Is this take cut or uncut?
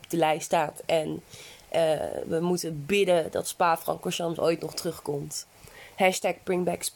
uncut